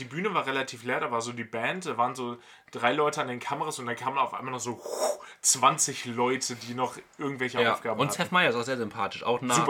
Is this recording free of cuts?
yes; 0 cuts

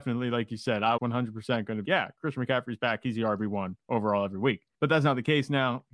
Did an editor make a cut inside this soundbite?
yes; 3 cuts; at 1.0 s, 1.8 s, 4.7 s

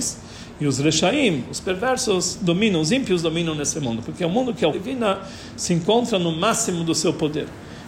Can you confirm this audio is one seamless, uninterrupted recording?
no; 1 cut; at 4.7 s

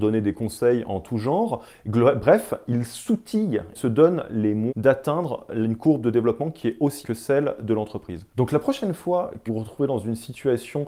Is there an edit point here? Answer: yes; 4 cuts; at 3.7 s, 4.7 s, 7.0 s, 9.5 s

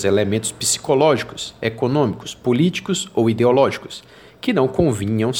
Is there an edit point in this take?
no; 0 cuts

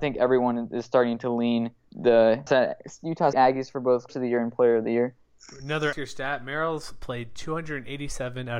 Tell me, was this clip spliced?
yes; 5 cuts; at 1.9 s, 2.5 s, 3.3 s, 4.1 s, 5.9 s

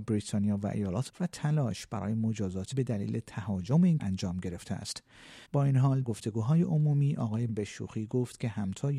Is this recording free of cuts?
no; 6 cuts; at 1.1 s, 2.7 s, 4.0 s, 5.4 s, 6.0 s, 7.5 s

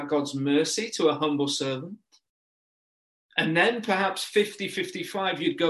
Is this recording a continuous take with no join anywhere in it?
yes; 0 cuts

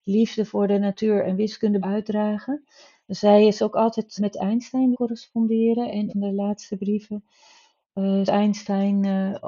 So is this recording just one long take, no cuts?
no; 5 cuts; at 1.8 s, 4.2 s, 4.9 s, 6.1 s, 8.3 s

